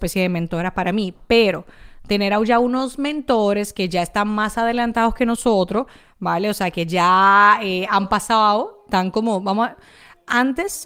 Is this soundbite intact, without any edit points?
yes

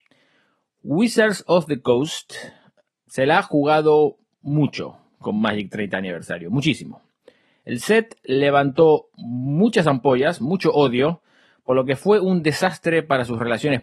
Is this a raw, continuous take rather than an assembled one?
yes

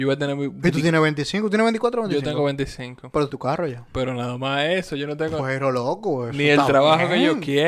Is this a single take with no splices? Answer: no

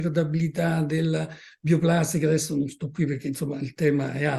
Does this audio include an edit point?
no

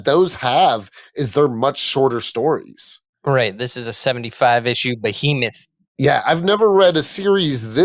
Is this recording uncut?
yes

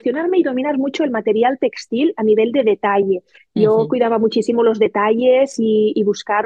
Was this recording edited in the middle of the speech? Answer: no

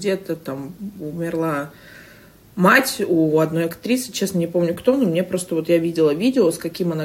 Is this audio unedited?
yes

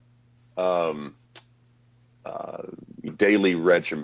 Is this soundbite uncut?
no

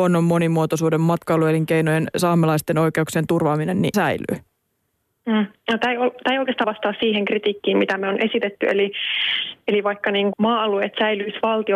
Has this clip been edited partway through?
yes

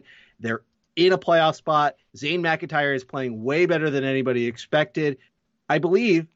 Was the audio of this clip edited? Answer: no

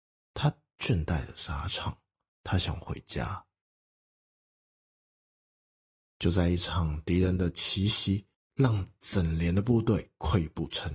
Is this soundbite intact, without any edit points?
no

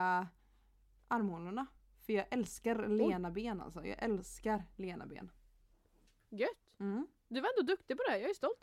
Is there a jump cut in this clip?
no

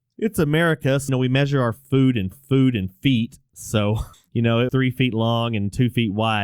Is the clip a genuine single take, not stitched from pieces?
no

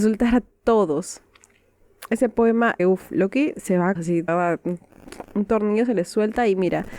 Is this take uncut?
no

